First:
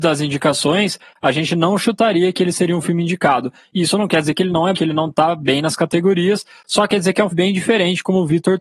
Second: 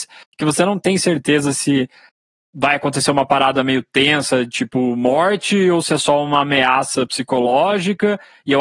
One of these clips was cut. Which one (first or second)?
first